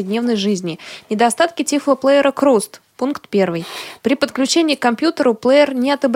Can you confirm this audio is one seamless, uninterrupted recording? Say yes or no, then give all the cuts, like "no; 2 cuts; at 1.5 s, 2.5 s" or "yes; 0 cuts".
yes; 0 cuts